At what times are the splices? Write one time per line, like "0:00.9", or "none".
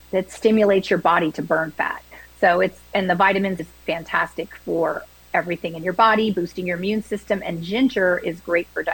0:03.6